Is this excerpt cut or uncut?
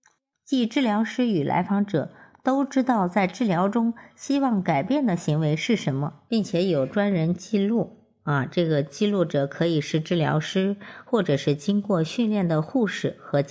uncut